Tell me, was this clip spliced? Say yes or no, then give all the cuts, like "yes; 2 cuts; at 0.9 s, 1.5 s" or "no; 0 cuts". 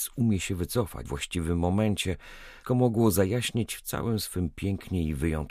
yes; 2 cuts; at 1.1 s, 2.6 s